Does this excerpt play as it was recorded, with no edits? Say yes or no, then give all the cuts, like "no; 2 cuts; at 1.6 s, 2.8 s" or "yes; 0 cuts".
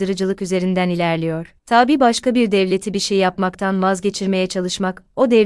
no; 1 cut; at 1.6 s